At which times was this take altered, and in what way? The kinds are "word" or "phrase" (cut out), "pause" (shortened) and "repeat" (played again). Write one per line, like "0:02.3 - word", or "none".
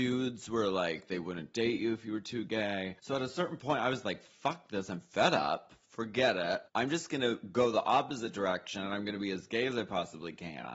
0:03.0 - pause
0:06.7 - pause